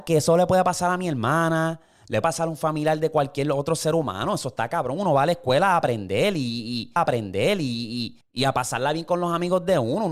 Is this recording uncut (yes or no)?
no